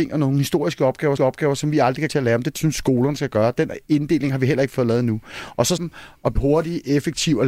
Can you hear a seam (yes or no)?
yes